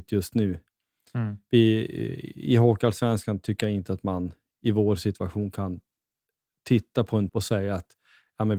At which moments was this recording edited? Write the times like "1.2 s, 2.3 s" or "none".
7.3 s